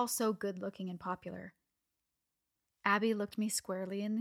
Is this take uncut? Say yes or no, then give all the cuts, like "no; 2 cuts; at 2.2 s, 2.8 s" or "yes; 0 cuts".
yes; 0 cuts